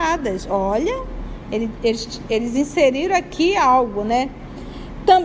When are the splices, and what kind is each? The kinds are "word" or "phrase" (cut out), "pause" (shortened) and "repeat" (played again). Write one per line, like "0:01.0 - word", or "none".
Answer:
none